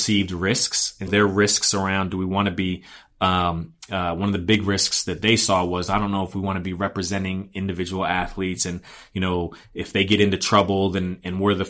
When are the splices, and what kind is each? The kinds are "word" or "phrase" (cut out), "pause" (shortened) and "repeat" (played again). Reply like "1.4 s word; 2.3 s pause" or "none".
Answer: 1.1 s word